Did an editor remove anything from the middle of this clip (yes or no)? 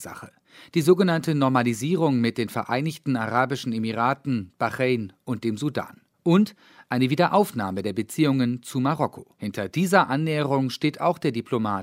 no